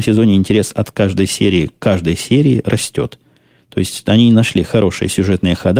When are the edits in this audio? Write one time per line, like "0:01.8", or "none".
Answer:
none